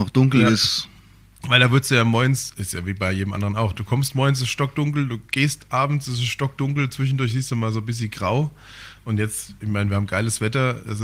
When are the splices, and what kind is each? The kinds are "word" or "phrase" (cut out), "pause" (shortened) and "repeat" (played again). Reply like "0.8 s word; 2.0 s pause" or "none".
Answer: none